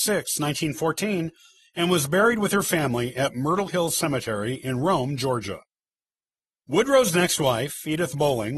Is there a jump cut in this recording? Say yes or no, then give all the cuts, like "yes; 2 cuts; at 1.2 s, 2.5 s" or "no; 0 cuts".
no; 0 cuts